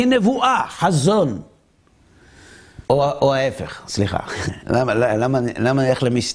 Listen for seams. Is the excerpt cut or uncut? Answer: cut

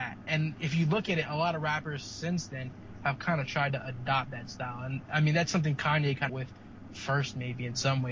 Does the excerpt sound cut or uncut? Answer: cut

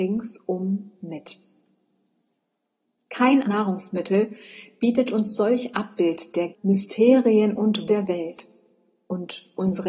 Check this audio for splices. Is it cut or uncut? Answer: cut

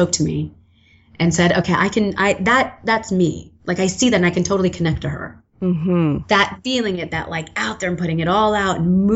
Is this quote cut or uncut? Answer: uncut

